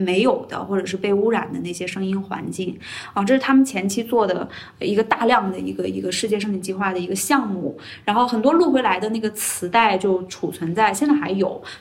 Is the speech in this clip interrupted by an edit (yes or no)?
no